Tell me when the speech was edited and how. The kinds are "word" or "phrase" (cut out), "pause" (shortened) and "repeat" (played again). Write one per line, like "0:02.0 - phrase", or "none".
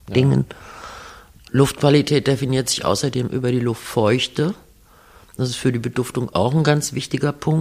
none